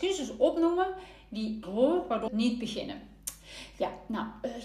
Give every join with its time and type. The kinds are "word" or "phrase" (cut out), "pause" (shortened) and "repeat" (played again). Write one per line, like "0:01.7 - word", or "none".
0:01.6 - word
0:02.3 - word